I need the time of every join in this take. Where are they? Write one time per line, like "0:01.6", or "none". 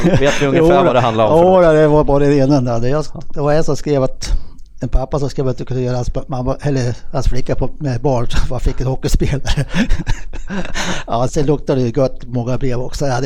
0:11.3